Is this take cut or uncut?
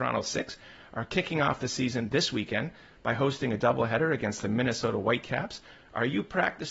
uncut